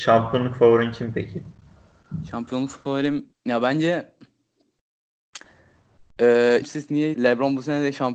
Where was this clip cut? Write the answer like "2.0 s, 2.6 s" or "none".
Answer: 3.3 s, 6.6 s, 7.1 s